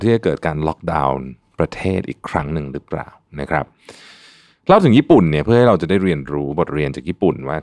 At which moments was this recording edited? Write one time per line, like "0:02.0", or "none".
none